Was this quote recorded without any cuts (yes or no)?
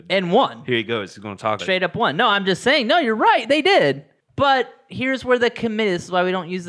no